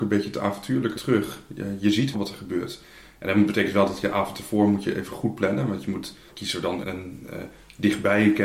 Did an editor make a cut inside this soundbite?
yes; 4 cuts; at 0.9 s, 2.1 s, 6.3 s, 6.8 s

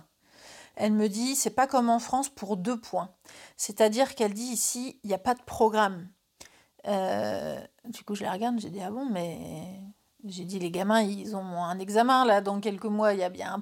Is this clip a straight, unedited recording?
yes; 0 cuts

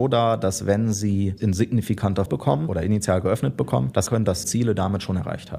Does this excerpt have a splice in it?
yes; 4 cuts; at 1.4 s, 2.3 s, 4.1 s, 4.4 s

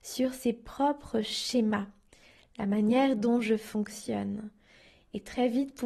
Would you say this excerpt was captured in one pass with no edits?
yes; 0 cuts

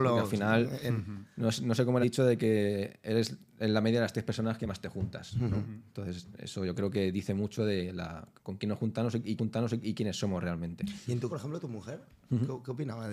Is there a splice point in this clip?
yes; 4 cuts; at 2.0 s, 8.4 s, 9.4 s, 11.3 s

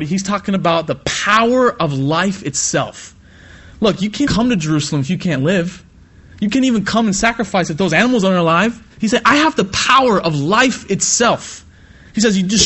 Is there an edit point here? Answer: yes; 2 cuts; at 4.3 s, 8.9 s

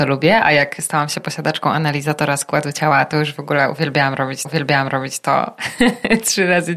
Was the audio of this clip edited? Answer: yes; 1 cut; at 4.4 s

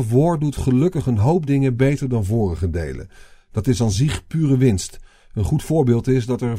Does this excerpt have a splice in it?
no; 0 cuts

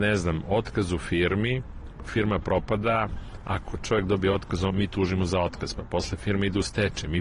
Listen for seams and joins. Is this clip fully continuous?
yes; 0 cuts

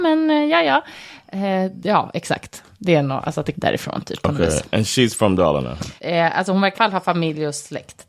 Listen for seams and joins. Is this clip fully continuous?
no; 3 cuts; at 3.5 s, 6.0 s, 6.7 s

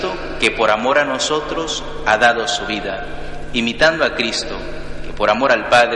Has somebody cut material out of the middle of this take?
no; 0 cuts

